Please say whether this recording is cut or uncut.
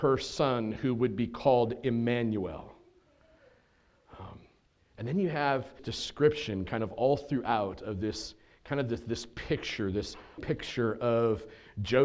cut